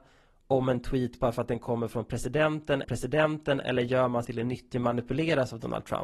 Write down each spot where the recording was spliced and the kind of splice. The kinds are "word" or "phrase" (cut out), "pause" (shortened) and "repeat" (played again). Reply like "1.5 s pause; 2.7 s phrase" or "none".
2.8 s repeat; 4.2 s word; 4.7 s phrase

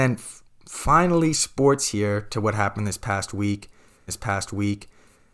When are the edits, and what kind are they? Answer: 1.3 s word; 4.1 s repeat

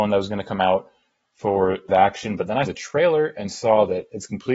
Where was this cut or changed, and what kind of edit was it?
1.9 s word; 2.7 s word

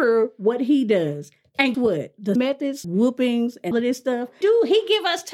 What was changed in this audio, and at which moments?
1.7 s word; 2.4 s word; 2.8 s word; 3.7 s word; 4.4 s word

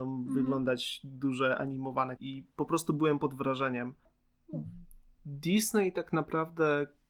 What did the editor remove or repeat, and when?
2.2 s word

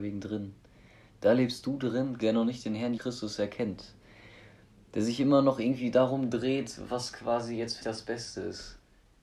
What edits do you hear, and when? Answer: 2.2 s word; 3.0 s word; 7.8 s word

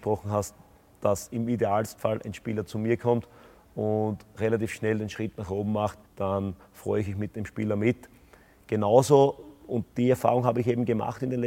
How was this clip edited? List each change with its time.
6.1 s pause

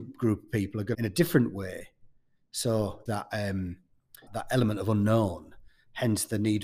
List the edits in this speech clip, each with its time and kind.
0.9 s phrase; 3.1 s phrase; 4.3 s word

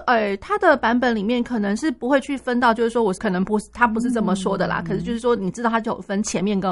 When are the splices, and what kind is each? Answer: 3.2 s phrase

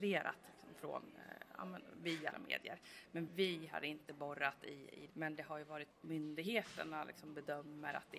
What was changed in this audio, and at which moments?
2.3 s word; 3.3 s word; 5.1 s phrase; 5.9 s phrase

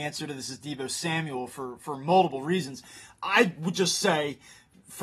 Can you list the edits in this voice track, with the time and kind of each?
none

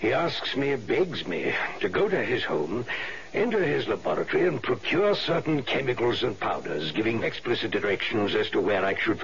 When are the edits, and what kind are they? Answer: 7.2 s word

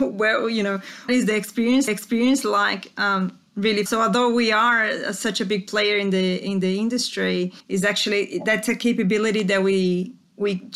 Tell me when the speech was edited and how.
1.1 s word; 1.9 s repeat; 3.9 s phrase; 7.6 s pause

